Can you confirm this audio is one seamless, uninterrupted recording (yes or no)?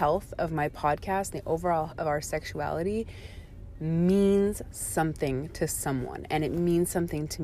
no